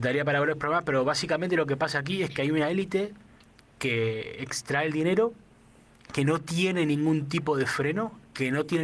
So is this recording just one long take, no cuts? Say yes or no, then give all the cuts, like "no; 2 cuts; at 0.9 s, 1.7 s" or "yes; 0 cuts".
yes; 0 cuts